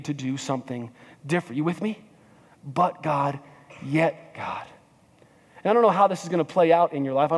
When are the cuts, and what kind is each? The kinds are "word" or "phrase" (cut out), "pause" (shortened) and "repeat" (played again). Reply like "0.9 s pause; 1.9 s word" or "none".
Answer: none